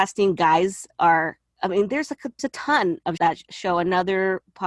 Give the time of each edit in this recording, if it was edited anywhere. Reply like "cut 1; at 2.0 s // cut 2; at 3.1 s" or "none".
cut 1; at 2.4 s // cut 2; at 3.2 s